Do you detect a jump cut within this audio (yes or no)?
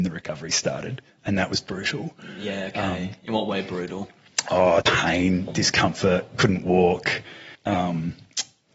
yes